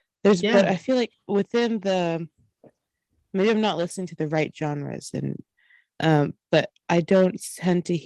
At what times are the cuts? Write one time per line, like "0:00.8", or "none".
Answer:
none